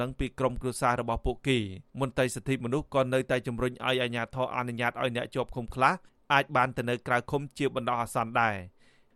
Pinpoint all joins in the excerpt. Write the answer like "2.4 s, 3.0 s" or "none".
1.9 s